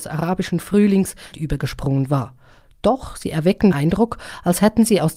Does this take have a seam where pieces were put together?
yes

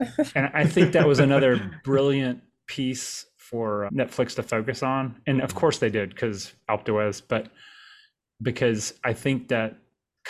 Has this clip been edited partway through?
yes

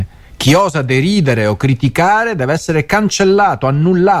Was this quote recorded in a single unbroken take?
yes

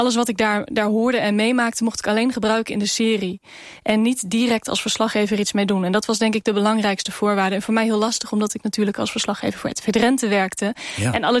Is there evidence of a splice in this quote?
no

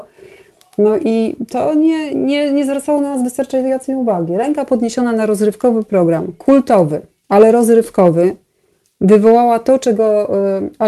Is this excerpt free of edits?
yes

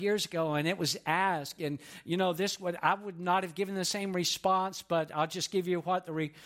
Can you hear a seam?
no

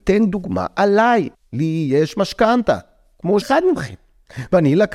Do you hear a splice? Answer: yes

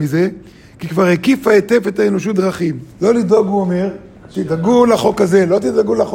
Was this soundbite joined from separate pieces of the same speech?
yes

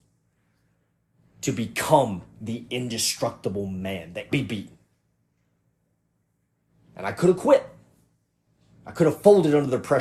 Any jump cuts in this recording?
yes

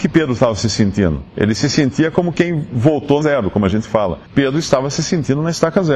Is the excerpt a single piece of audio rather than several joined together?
no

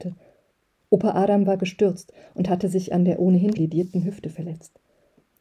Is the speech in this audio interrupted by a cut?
yes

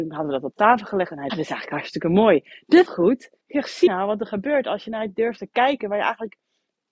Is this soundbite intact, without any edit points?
no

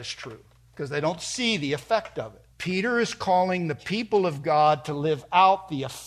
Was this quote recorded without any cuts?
no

